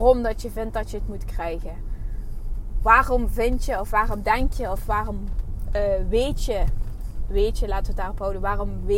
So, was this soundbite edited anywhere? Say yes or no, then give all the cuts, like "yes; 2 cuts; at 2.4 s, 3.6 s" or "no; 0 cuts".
no; 0 cuts